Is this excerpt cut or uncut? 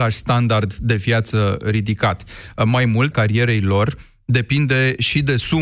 cut